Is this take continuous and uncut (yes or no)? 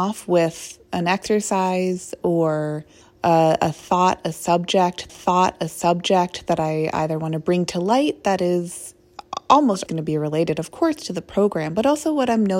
no